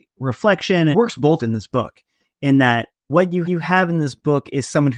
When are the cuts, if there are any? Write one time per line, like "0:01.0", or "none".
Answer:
0:00.9
0:01.4
0:03.4